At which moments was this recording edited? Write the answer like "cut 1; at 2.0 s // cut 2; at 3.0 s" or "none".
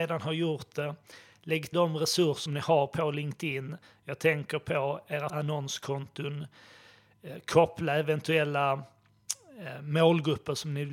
cut 1; at 1.7 s // cut 2; at 2.5 s // cut 3; at 5.3 s